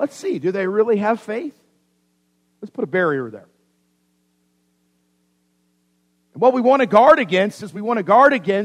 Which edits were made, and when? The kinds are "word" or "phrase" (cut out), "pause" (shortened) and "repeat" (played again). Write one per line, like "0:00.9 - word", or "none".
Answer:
none